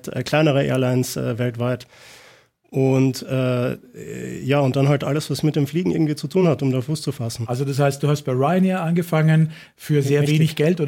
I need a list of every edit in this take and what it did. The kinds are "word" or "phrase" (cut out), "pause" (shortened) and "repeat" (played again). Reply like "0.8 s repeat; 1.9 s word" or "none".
none